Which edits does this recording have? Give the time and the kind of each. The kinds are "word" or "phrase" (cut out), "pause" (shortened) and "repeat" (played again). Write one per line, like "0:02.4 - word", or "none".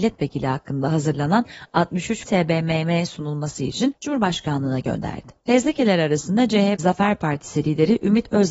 0:02.3 - word
0:04.0 - pause
0:05.4 - pause
0:06.8 - phrase